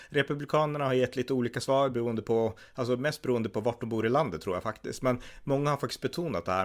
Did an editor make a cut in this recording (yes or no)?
no